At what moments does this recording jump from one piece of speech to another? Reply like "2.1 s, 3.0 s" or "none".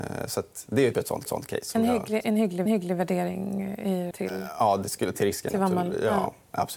0.9 s, 1.3 s, 2.7 s, 4.1 s, 5.1 s